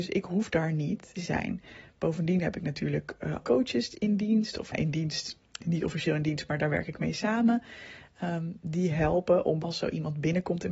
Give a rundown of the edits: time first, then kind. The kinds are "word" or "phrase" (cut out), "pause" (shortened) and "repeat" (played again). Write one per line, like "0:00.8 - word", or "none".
0:01.1 - phrase
0:03.4 - word
0:04.7 - word
0:09.6 - word